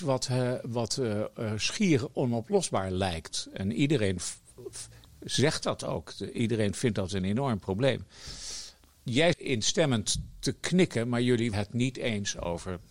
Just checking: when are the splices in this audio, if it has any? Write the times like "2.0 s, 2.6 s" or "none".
9.3 s, 11.5 s